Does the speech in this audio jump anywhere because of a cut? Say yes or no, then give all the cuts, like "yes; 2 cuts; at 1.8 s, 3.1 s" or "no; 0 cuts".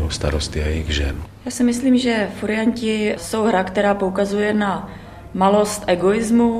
no; 0 cuts